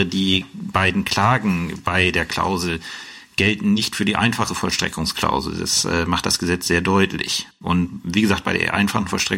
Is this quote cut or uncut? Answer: uncut